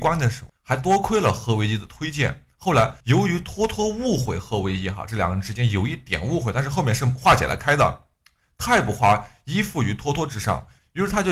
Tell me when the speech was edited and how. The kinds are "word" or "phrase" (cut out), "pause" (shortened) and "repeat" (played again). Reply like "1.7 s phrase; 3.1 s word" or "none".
3.0 s pause